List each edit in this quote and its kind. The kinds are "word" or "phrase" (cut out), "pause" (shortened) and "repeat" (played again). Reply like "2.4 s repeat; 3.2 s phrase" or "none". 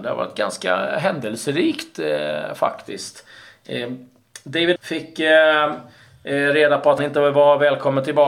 4.8 s word; 7.0 s word

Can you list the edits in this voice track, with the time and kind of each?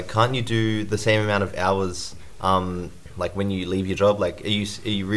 none

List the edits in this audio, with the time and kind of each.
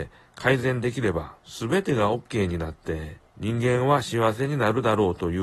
1.4 s pause; 3.3 s pause

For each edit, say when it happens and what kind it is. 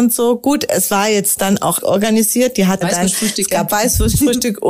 1.8 s word; 2.8 s phrase

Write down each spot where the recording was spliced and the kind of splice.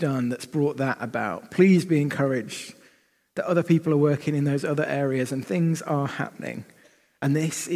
none

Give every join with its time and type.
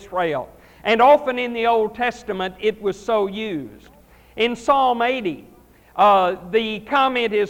none

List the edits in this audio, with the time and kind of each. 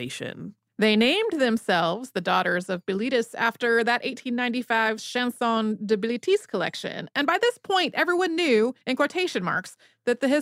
8.8 s pause

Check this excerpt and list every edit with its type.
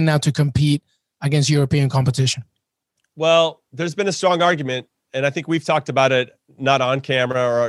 none

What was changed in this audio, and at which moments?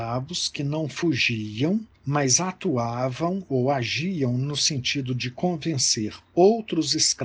1.9 s pause

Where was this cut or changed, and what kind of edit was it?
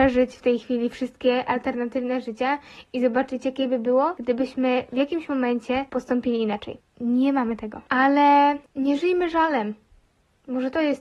none

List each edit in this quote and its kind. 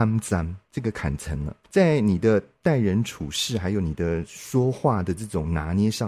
1.6 s pause

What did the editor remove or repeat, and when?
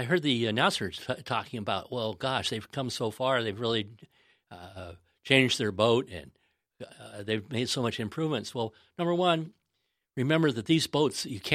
none

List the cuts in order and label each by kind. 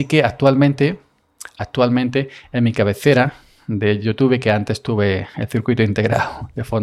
none

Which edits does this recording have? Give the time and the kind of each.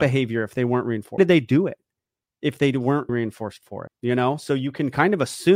1.2 s word; 3.1 s word; 3.9 s word

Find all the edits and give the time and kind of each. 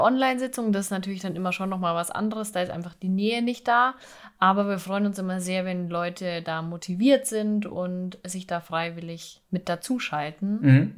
9.5 s pause

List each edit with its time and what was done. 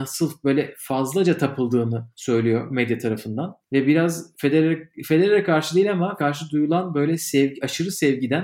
2.1 s pause; 3.6 s pause; 4.3 s word; 6.2 s word

